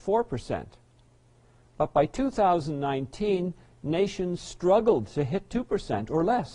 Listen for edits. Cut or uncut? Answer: uncut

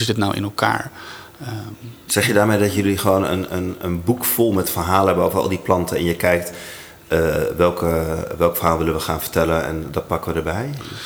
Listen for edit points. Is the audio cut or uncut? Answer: cut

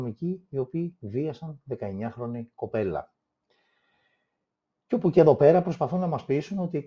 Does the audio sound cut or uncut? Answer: uncut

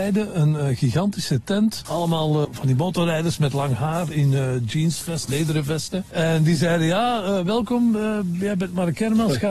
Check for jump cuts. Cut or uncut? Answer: cut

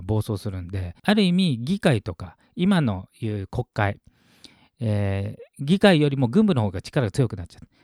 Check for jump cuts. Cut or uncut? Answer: cut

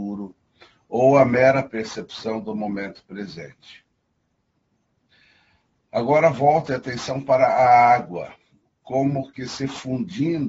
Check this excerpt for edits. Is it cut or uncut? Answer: uncut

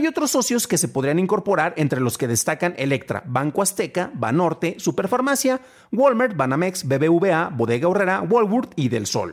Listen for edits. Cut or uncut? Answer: uncut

